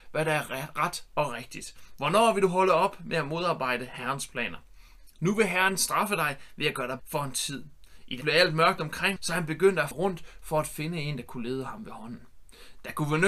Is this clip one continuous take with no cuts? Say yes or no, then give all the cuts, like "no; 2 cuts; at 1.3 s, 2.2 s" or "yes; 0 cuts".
no; 4 cuts; at 7.0 s, 8.2 s, 9.2 s, 9.9 s